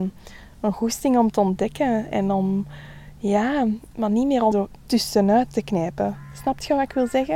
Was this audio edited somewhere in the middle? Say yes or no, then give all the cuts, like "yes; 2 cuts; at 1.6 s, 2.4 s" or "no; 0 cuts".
yes; 1 cut; at 4.5 s